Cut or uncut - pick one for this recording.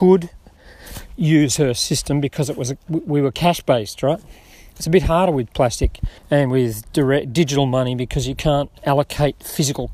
cut